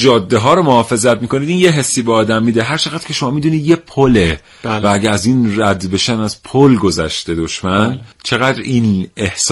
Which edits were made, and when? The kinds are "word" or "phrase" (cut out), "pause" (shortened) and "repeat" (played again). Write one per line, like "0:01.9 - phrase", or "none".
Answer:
0:08.1 - pause